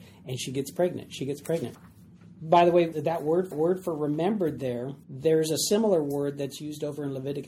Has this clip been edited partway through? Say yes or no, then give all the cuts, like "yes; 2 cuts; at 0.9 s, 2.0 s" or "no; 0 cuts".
yes; 2 cuts; at 3.5 s, 5.0 s